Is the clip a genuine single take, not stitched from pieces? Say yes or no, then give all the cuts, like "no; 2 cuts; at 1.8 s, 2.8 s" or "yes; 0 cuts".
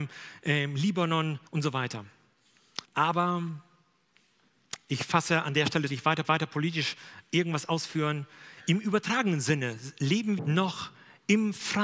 no; 5 cuts; at 1.5 s, 2.8 s, 5.9 s, 6.2 s, 10.4 s